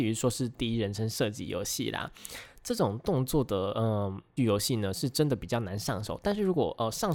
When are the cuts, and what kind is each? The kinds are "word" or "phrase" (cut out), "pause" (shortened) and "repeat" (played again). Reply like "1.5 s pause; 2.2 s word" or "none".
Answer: 4.4 s word